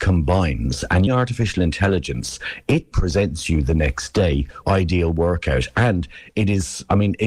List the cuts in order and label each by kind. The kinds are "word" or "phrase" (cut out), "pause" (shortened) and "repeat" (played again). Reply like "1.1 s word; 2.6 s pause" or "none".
1.1 s word; 2.9 s word; 4.6 s phrase